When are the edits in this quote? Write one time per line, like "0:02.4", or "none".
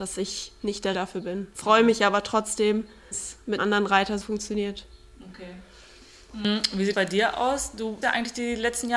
0:00.9
0:03.1
0:03.6
0:04.2
0:06.9
0:08.0